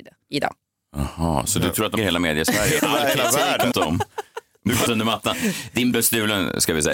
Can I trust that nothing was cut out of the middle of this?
no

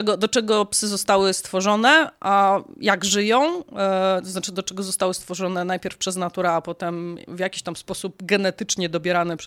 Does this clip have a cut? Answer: no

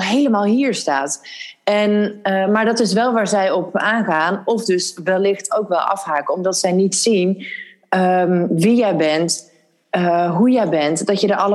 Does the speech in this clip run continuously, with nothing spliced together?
yes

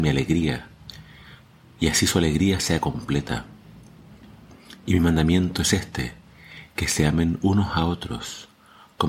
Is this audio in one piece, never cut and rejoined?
yes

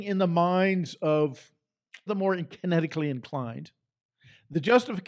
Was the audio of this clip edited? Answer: yes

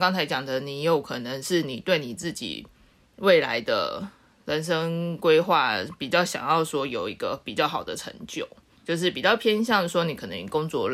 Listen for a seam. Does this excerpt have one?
yes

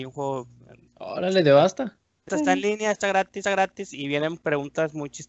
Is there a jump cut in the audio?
yes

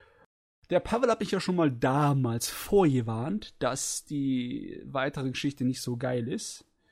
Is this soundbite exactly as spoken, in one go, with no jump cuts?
yes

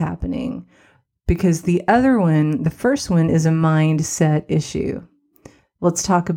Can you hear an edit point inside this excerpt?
no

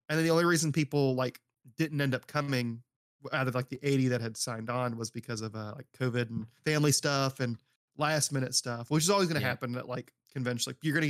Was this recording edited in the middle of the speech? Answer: yes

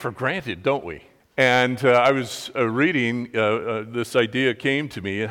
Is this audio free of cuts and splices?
yes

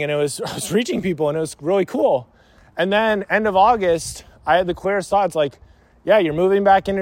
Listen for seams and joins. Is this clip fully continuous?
yes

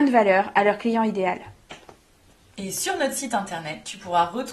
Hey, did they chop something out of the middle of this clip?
no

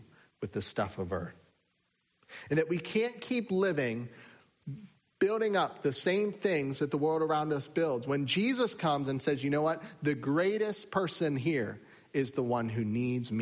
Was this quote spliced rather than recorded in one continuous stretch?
no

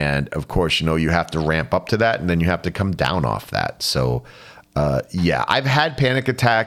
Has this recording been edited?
no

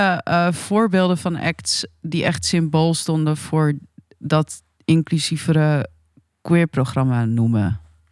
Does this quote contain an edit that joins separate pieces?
no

